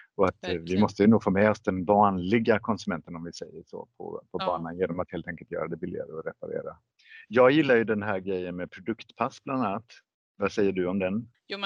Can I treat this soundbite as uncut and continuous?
yes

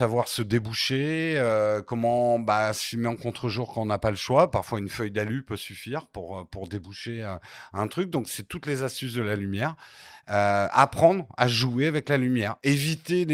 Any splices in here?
no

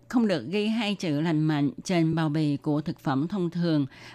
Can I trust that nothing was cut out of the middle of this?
yes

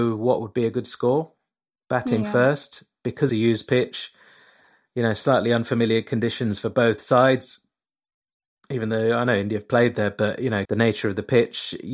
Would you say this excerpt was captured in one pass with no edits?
no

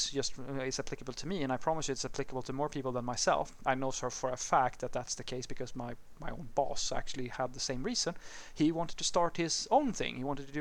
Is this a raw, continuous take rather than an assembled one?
yes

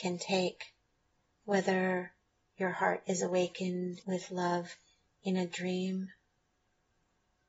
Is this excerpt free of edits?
no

